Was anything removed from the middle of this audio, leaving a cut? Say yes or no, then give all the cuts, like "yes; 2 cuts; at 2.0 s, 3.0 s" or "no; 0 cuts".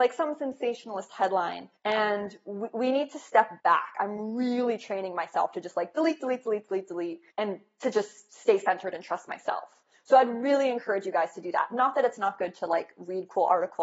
yes; 3 cuts; at 1.8 s, 3.6 s, 7.3 s